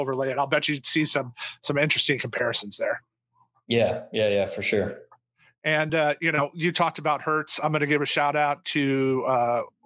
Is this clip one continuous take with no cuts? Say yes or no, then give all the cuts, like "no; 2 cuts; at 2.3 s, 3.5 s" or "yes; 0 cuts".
yes; 0 cuts